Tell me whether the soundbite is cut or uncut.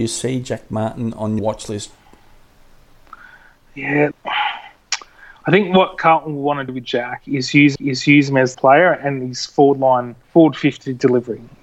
cut